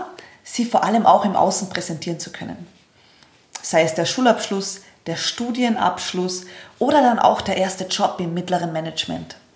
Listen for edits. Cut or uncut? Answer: uncut